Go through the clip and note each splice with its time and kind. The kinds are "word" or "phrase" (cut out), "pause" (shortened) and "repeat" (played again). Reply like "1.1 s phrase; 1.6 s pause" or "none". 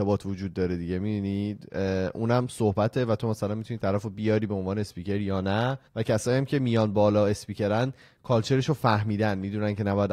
5.9 s pause